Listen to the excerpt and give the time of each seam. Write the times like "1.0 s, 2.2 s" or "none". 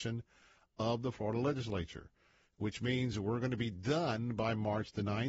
none